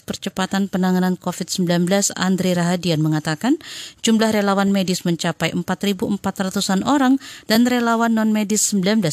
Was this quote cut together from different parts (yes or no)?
no